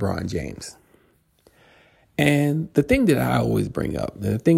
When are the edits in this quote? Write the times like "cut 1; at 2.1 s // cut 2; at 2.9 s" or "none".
none